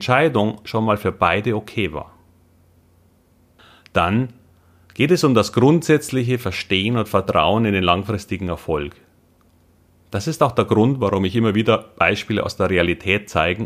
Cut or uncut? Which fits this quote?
uncut